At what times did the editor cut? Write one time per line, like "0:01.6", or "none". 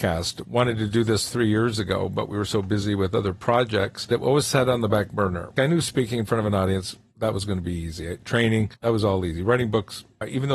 none